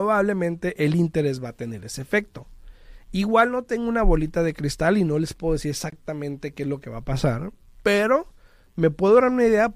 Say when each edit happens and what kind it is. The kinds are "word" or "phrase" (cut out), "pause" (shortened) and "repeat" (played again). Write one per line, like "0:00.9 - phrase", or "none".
none